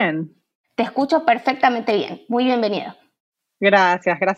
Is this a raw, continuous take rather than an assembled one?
yes; 0 cuts

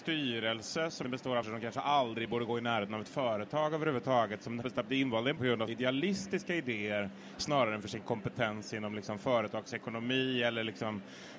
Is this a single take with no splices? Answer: no; 5 cuts; at 1.0 s, 1.4 s, 4.6 s, 5.4 s, 5.7 s

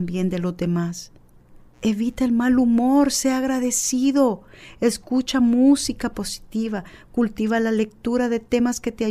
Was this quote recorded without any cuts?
no; 1 cut; at 1.7 s

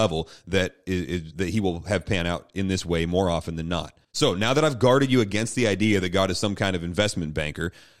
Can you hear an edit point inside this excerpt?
yes; 1 cut; at 4.0 s

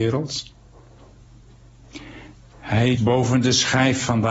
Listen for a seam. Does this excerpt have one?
yes; 1 cut; at 3.0 s

